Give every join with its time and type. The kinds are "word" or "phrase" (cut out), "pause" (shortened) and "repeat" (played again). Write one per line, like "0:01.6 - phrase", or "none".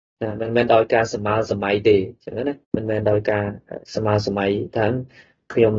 0:02.6 - pause